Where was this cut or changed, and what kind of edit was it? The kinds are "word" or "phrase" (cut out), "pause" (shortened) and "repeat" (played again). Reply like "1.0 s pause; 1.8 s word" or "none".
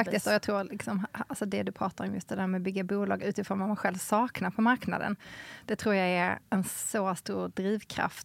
6.5 s pause